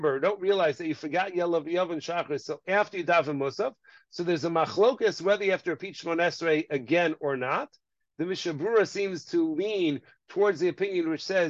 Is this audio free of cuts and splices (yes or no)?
yes